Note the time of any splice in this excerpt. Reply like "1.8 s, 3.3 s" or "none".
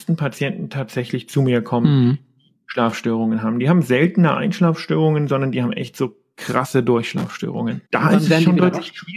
7.9 s